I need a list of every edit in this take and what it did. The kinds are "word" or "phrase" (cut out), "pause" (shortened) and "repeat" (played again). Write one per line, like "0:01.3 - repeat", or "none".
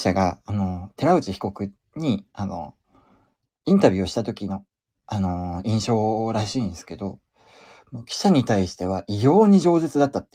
none